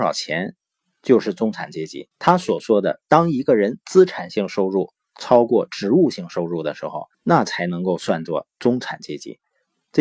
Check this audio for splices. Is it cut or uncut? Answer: cut